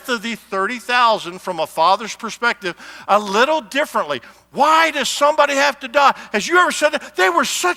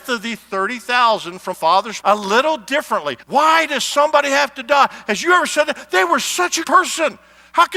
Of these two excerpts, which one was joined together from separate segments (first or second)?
second